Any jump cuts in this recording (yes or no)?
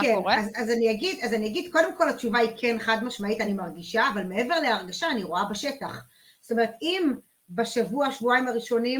no